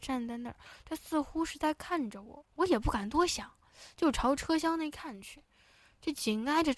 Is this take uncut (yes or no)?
no